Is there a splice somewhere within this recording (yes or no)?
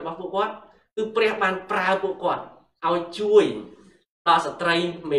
no